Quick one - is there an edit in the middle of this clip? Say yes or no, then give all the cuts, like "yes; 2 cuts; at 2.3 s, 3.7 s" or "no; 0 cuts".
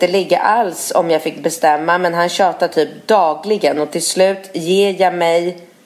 no; 0 cuts